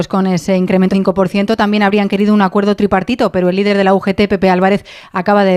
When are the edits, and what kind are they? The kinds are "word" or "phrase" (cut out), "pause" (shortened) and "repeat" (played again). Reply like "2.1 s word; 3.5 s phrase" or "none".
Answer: 0.9 s word